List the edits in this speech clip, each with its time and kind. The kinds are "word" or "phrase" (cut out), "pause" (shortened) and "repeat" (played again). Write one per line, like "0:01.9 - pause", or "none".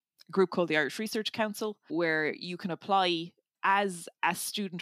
none